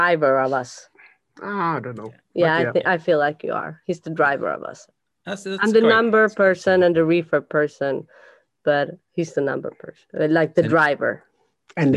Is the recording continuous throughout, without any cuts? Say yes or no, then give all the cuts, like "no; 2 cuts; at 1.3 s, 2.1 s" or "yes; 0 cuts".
yes; 0 cuts